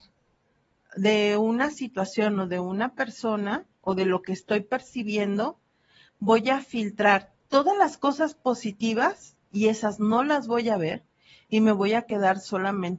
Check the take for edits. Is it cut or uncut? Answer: uncut